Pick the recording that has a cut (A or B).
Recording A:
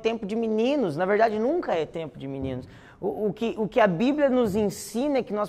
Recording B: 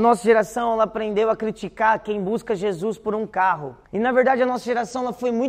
B